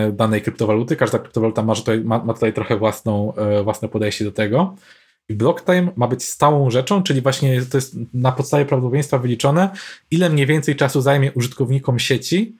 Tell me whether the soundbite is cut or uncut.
uncut